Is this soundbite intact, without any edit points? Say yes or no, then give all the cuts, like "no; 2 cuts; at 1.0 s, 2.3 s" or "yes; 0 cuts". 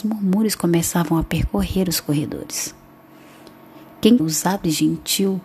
no; 1 cut; at 4.2 s